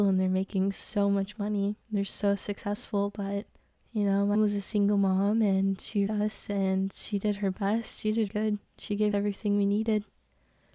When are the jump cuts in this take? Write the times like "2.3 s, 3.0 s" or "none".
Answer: 1.8 s, 3.6 s, 4.3 s, 6.1 s, 8.3 s, 9.1 s